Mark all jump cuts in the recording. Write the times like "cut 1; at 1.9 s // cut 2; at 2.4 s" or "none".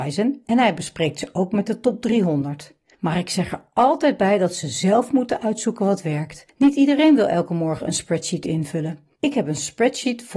none